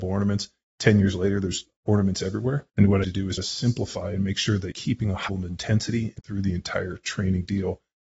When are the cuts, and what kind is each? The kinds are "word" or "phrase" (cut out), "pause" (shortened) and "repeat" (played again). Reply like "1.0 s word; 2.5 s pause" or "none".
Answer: 2.7 s pause; 3.0 s phrase; 3.4 s word; 4.7 s word; 5.3 s word; 6.2 s word